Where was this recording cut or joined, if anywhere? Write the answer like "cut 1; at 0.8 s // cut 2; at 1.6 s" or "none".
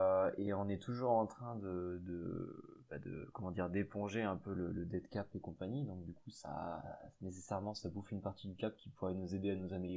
none

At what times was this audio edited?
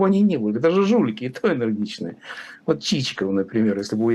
none

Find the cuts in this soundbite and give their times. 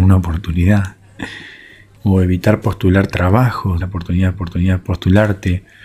cut 1; at 2.0 s // cut 2; at 3.1 s // cut 3; at 3.8 s // cut 4; at 4.3 s

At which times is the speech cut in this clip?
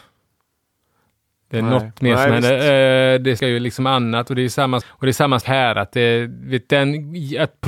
cut 1; at 3.4 s // cut 2; at 4.8 s // cut 3; at 5.4 s

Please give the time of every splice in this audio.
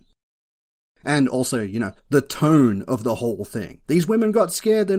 cut 1; at 2.0 s // cut 2; at 3.8 s

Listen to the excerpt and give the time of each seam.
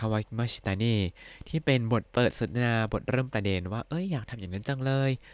cut 1; at 2.1 s

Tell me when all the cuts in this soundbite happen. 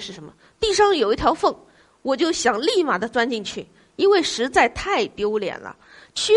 none

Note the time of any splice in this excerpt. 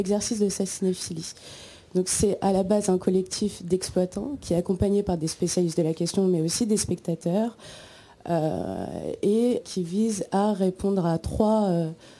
cut 1; at 9.6 s

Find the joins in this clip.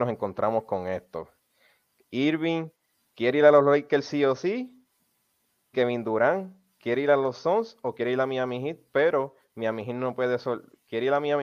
cut 1; at 5.7 s

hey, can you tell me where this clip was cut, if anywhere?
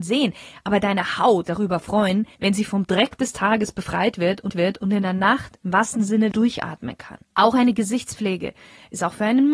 cut 1; at 1.5 s // cut 2; at 2.4 s // cut 3; at 4.5 s // cut 4; at 6.3 s // cut 5; at 7.2 s

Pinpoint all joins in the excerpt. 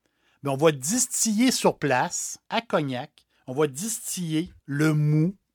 cut 1; at 2.5 s // cut 2; at 4.6 s

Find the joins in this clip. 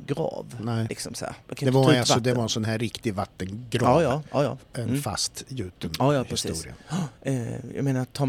cut 1; at 1.4 s // cut 2; at 7.1 s

